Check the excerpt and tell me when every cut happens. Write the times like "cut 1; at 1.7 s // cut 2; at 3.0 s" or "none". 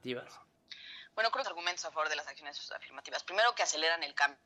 cut 1; at 1.4 s

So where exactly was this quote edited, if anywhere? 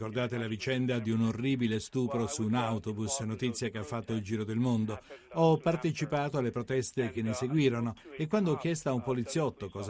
none

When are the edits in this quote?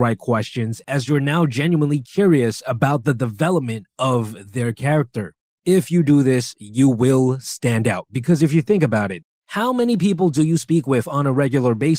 none

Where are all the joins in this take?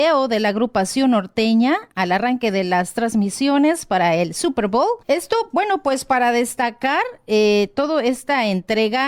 cut 1; at 1.9 s // cut 2; at 5.0 s

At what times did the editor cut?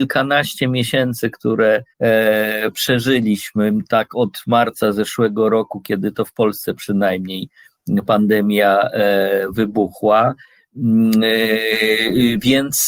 cut 1; at 1.9 s

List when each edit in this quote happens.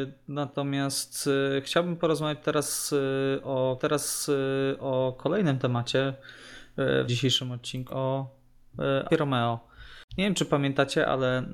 cut 1; at 3.8 s // cut 2; at 7.1 s // cut 3; at 7.9 s // cut 4; at 9.1 s // cut 5; at 10.1 s

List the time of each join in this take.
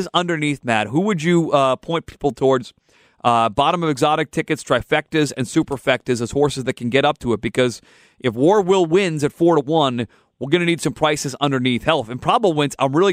none

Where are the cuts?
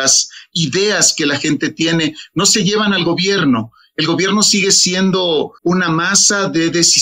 cut 1; at 5.6 s

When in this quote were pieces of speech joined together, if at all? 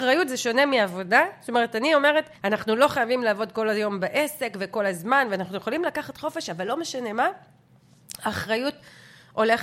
cut 1; at 2.3 s

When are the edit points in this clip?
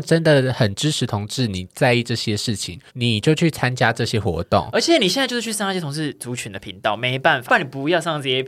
cut 1; at 2.9 s // cut 2; at 7.5 s

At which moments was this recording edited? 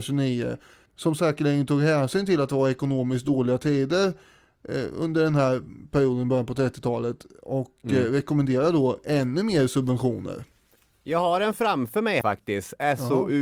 cut 1; at 12.2 s

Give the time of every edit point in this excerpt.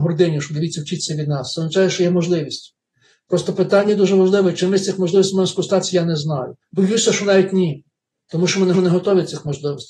cut 1; at 6.6 s // cut 2; at 8.7 s

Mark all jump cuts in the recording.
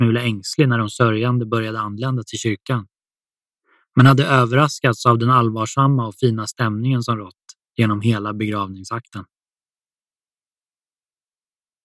none

